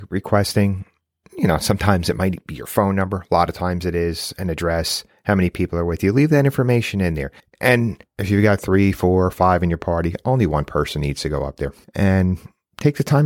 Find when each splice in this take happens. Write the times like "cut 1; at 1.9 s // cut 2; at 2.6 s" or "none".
cut 1; at 7.4 s